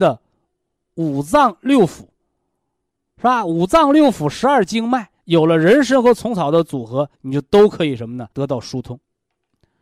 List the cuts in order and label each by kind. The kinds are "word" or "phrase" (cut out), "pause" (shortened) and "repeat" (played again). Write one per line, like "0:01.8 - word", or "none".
0:05.2 - pause
0:07.1 - pause
0:08.3 - pause